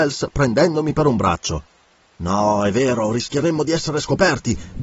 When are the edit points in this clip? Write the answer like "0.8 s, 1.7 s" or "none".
none